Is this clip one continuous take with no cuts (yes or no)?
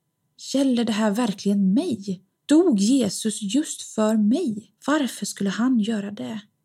no